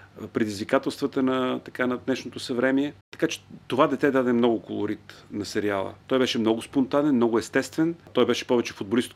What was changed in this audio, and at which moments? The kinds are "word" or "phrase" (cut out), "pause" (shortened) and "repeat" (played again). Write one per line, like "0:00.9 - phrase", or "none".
0:03.0 - pause
0:03.6 - pause
0:06.0 - pause